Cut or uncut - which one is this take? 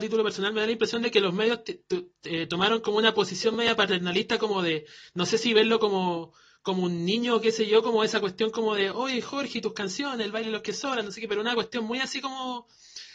uncut